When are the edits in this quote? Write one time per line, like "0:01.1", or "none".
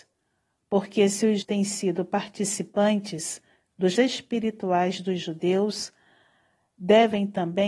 0:01.4
0:03.9